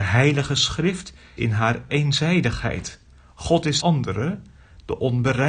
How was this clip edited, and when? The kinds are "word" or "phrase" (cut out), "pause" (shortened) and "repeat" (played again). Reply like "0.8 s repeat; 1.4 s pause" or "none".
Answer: 1.4 s word; 1.9 s phrase; 3.8 s phrase